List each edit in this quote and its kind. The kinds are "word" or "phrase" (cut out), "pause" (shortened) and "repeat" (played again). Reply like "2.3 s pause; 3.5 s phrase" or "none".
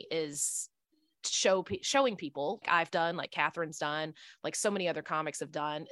2.6 s word